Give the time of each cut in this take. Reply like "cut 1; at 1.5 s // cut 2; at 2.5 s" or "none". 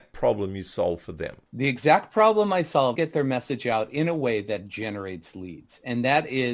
cut 1; at 1.4 s // cut 2; at 2.9 s